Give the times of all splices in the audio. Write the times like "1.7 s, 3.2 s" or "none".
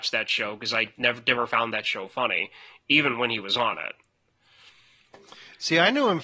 none